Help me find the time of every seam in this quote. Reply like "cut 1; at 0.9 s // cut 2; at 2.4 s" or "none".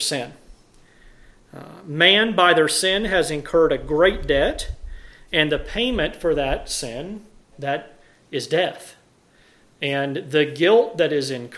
cut 1; at 7.5 s